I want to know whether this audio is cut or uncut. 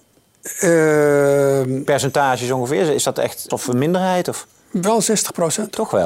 cut